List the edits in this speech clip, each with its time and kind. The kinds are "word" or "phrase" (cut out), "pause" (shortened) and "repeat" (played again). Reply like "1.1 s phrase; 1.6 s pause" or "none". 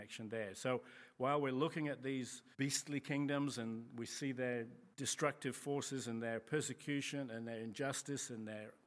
2.5 s pause; 4.9 s pause